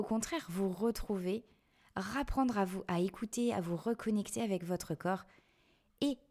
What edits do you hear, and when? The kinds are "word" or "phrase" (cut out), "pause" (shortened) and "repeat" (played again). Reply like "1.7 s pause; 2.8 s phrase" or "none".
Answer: none